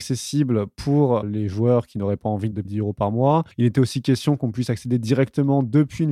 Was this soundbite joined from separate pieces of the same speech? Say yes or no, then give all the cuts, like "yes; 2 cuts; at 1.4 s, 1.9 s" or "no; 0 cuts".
yes; 2 cuts; at 2.6 s, 3.5 s